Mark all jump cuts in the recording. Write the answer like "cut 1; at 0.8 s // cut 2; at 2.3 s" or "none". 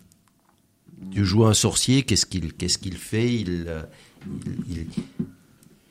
none